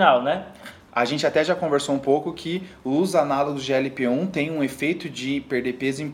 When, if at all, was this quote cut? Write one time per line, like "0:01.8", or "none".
none